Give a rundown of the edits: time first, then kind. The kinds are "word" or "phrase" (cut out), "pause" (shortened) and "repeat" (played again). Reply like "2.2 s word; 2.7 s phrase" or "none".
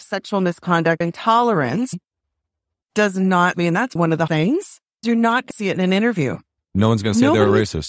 1.0 s word; 2.8 s word; 3.5 s word; 4.0 s word; 4.3 s word; 5.0 s word; 5.5 s word

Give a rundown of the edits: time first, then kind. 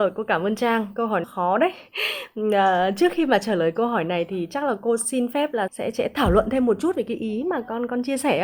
1.2 s phrase; 5.7 s word

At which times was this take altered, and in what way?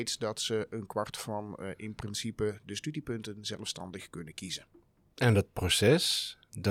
none

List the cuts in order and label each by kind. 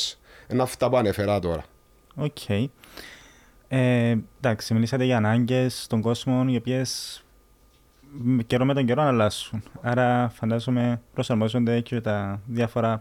none

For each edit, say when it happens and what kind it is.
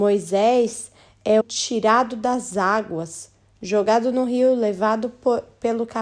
1.4 s word

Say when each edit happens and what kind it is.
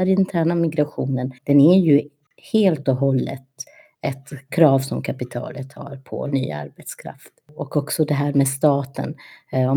1.4 s pause

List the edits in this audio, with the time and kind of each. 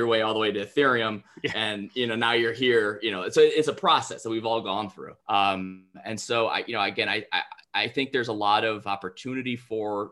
5.2 s pause

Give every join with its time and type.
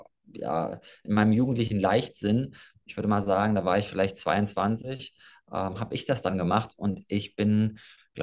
none

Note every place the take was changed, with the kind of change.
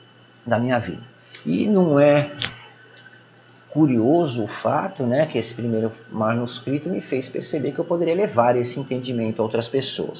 none

